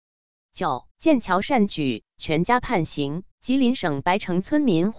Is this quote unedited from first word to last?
no; 2 cuts; at 0.9 s, 3.3 s

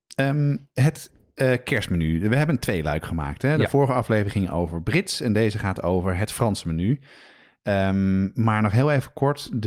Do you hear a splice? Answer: no; 0 cuts

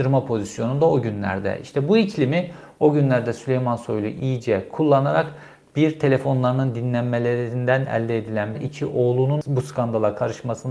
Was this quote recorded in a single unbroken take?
no; 1 cut; at 8.5 s

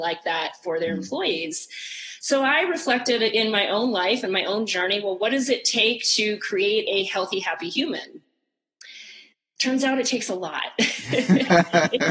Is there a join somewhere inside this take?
no; 0 cuts

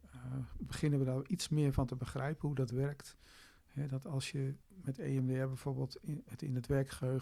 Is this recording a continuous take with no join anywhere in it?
no; 1 cut; at 4.6 s

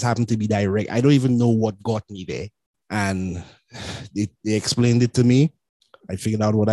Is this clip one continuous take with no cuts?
yes; 0 cuts

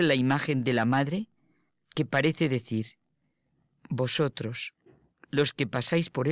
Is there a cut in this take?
no; 0 cuts

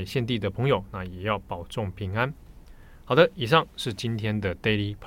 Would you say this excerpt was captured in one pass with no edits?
yes; 0 cuts

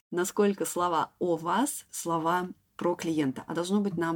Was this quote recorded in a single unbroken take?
no; 1 cut; at 1.9 s

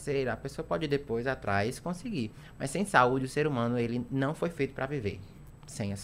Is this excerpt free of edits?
yes; 0 cuts

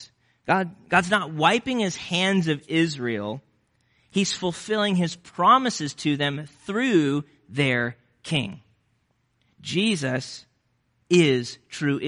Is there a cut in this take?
no; 0 cuts

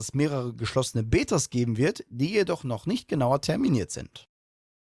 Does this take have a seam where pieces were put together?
no; 0 cuts

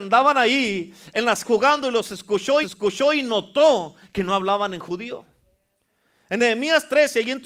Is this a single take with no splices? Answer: no; 2 cuts; at 1.4 s, 2.6 s

